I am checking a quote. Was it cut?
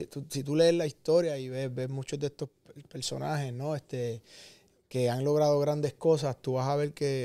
no; 0 cuts

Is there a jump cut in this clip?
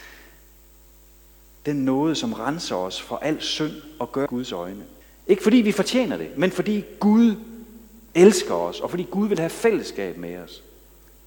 yes; 2 cuts; at 4.3 s, 5.0 s

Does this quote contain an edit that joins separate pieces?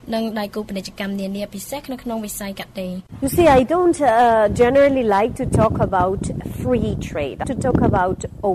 yes; 1 cut; at 7.4 s

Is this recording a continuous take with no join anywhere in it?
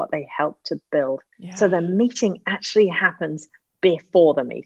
yes; 0 cuts

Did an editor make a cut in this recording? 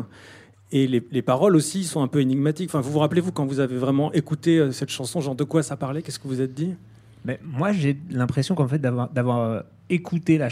no; 0 cuts

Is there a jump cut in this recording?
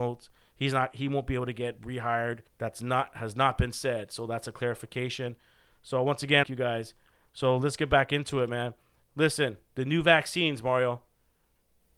yes; 2 cuts; at 2.5 s, 6.4 s

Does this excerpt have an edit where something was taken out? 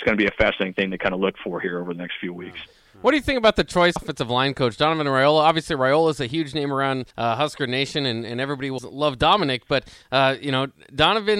yes; 3 cuts; at 4.0 s, 7.1 s, 8.8 s

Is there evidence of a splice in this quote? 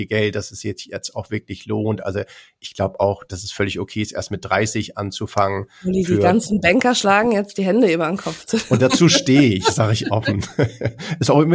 no; 0 cuts

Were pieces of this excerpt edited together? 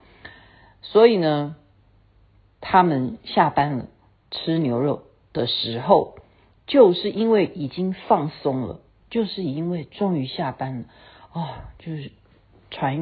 no; 0 cuts

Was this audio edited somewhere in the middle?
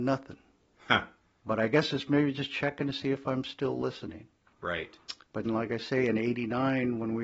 yes; 1 cut; at 5.5 s

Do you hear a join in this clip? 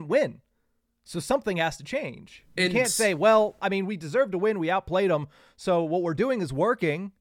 no; 0 cuts

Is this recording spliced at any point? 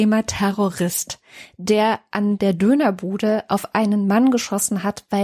no; 0 cuts

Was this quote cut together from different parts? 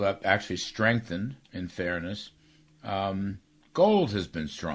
yes; 1 cut; at 1.4 s

